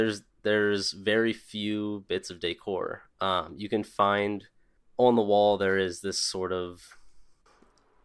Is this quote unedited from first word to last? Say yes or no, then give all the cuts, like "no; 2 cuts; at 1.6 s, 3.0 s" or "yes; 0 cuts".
yes; 0 cuts